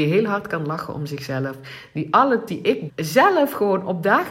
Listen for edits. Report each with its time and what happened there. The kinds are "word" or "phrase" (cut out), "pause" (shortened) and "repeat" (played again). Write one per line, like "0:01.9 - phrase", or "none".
0:02.5 - word
0:02.9 - word